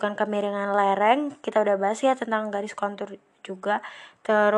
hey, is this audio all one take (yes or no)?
yes